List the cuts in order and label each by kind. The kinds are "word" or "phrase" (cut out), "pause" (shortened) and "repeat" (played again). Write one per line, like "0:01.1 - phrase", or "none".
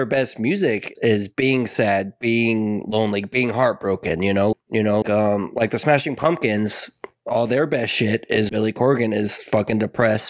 0:01.0 - word
0:04.5 - word
0:05.0 - word
0:08.5 - word